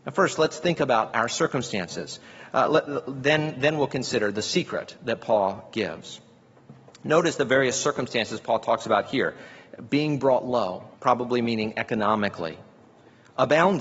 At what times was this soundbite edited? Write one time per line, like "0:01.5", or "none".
0:11.0